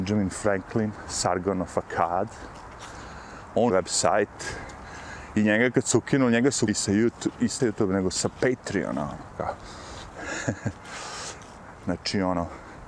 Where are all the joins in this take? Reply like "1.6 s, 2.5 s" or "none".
3.7 s, 6.7 s, 7.6 s